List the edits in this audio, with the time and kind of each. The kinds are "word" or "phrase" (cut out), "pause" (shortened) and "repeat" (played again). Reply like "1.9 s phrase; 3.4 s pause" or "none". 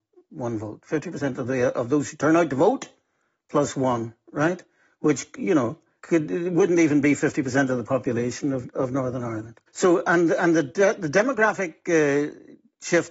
6.0 s word; 9.7 s pause